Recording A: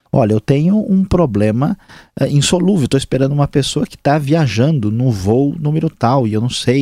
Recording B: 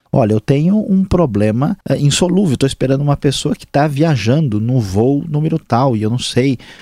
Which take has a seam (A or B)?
B